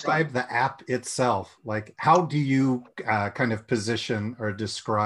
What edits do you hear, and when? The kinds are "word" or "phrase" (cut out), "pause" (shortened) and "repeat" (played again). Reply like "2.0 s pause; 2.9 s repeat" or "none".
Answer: none